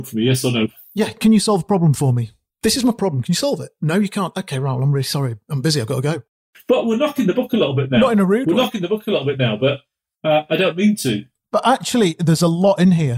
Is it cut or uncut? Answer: uncut